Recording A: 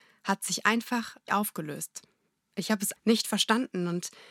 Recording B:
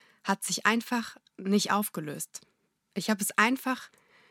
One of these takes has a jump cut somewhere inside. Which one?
A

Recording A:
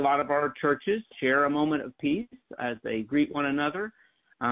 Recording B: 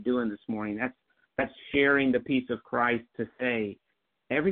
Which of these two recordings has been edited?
A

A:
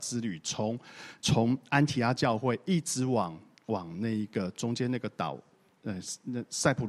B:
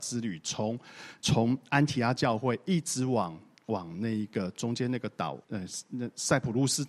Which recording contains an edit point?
B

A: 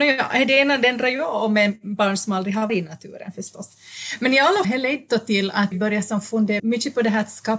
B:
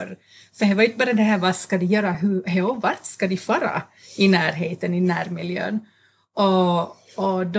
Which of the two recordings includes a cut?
A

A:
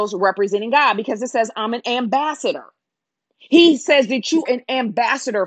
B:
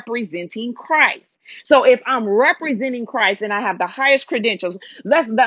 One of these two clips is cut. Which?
A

